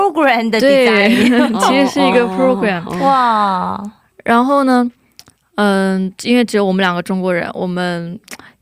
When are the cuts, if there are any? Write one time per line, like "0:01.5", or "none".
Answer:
none